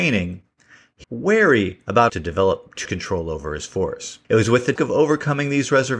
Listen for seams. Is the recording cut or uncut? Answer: cut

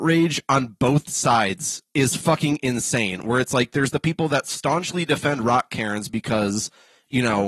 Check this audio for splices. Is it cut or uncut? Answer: uncut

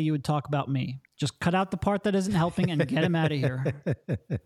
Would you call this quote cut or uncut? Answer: cut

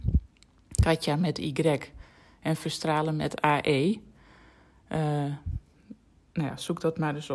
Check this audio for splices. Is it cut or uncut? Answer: uncut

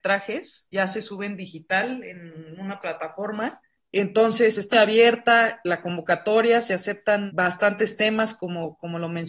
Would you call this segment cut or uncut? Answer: cut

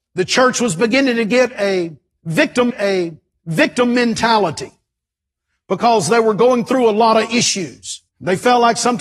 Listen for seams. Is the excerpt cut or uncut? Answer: cut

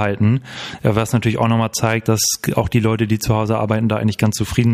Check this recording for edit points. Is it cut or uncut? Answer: uncut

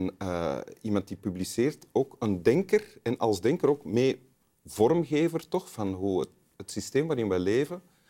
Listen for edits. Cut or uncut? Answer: uncut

